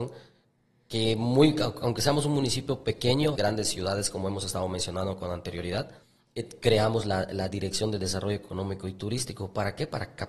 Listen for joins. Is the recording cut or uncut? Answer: cut